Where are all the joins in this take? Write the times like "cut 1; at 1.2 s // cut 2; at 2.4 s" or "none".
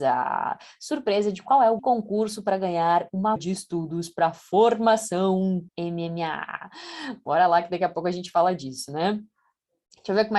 cut 1; at 1.8 s // cut 2; at 3.4 s // cut 3; at 5.7 s